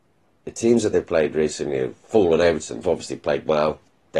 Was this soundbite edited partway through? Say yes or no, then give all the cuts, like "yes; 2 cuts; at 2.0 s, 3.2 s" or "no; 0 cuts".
yes; 1 cut; at 2.8 s